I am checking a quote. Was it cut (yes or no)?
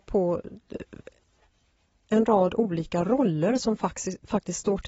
no